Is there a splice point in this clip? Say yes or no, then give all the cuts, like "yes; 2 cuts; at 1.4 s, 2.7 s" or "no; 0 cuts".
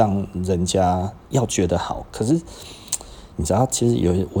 yes; 2 cuts; at 1.2 s, 3.3 s